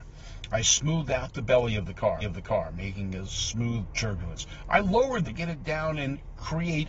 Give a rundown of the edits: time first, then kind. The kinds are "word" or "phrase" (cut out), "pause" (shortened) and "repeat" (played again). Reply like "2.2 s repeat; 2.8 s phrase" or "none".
2.2 s repeat; 3.9 s phrase; 5.3 s phrase